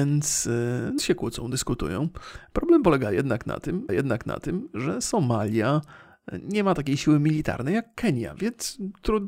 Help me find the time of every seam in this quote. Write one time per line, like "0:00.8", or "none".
0:01.0
0:03.9